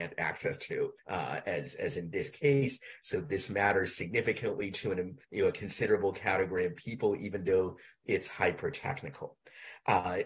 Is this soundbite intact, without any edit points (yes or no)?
no